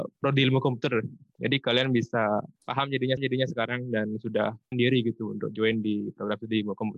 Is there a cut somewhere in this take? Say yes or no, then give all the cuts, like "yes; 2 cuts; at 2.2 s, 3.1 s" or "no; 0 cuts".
yes; 3 cuts; at 2.6 s, 3.2 s, 4.7 s